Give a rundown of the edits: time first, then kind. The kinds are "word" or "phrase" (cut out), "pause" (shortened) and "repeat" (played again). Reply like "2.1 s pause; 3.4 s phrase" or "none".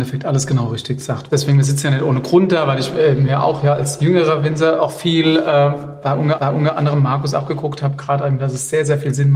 6.4 s repeat